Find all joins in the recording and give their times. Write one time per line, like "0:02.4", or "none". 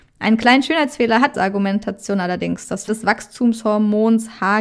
0:01.3
0:02.9